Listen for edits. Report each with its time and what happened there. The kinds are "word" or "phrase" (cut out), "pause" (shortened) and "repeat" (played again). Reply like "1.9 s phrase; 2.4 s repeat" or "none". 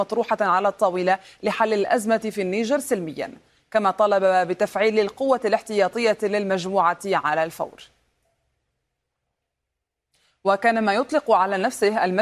none